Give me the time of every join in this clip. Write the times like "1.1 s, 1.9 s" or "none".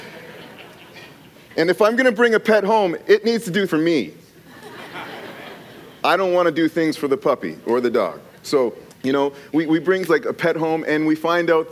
3.7 s, 8.9 s, 10.1 s